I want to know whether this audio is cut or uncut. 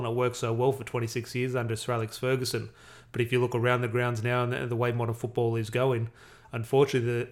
uncut